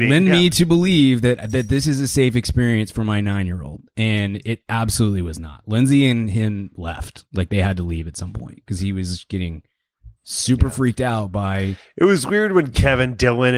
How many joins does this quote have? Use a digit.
1